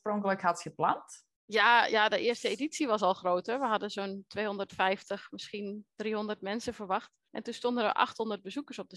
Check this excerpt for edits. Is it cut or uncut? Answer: cut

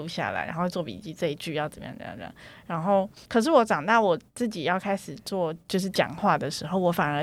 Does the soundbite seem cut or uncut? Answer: cut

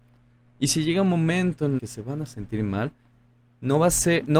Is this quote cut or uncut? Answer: cut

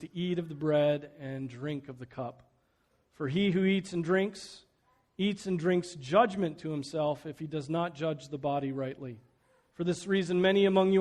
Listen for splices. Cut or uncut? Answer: uncut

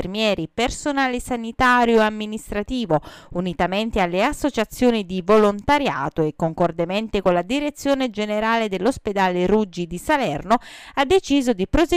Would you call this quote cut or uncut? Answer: uncut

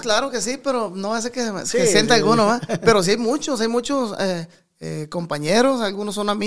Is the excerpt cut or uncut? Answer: uncut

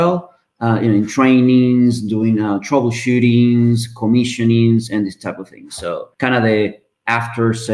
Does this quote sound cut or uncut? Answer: cut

